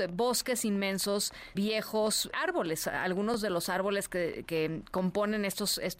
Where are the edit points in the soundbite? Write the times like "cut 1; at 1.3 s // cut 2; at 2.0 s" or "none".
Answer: cut 1; at 1.5 s // cut 2; at 2.3 s // cut 3; at 4.5 s